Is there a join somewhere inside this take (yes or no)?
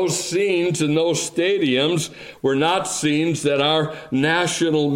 no